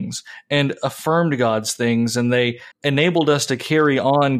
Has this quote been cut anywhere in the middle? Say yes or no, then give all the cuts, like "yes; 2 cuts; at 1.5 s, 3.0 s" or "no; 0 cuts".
yes; 1 cut; at 2.7 s